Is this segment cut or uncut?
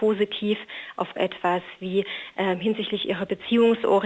cut